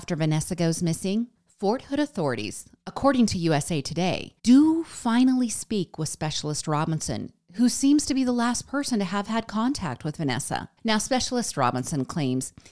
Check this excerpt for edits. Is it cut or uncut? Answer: cut